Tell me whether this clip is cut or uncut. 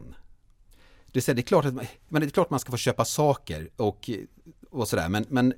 uncut